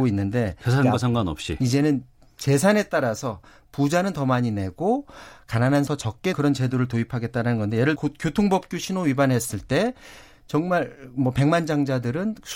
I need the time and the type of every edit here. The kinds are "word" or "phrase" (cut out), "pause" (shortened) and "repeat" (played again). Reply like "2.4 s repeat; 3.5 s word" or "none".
5.9 s word; 6.3 s word; 8.0 s word